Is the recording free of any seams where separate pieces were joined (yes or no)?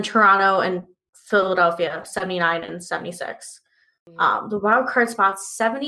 yes